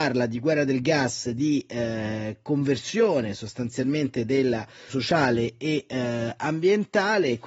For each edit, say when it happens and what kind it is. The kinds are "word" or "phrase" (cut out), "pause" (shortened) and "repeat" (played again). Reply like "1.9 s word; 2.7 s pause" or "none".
4.9 s phrase